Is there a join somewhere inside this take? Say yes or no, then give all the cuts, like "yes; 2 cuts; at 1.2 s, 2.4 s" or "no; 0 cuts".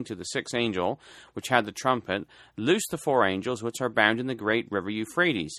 no; 0 cuts